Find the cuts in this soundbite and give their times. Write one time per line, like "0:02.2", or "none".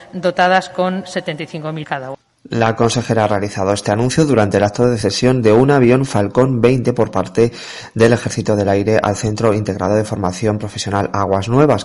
0:01.8